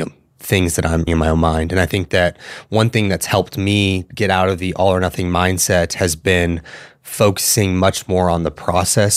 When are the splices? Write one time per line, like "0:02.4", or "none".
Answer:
0:01.1